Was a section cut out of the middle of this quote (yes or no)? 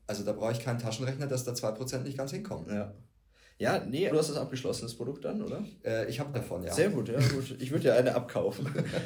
yes